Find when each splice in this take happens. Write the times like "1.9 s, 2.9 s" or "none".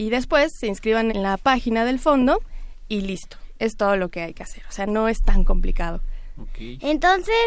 1.1 s